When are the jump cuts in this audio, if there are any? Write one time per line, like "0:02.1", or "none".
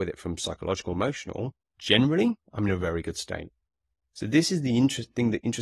none

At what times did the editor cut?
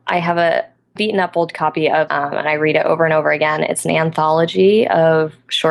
0:01.0
0:02.1

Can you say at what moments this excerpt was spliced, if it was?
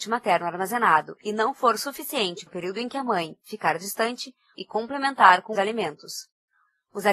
0:02.5
0:04.5
0:05.5

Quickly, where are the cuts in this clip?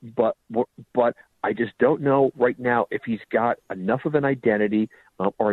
none

